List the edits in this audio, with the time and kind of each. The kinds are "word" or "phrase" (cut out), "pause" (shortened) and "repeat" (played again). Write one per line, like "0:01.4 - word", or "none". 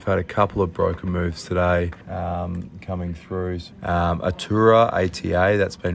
0:02.0 - pause
0:03.7 - phrase